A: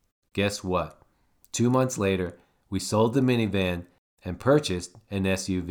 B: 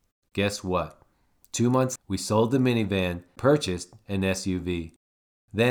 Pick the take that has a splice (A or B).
B